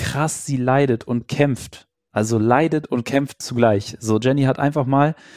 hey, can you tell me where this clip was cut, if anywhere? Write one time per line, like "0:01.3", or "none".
none